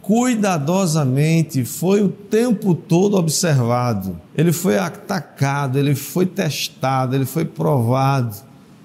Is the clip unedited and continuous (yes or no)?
no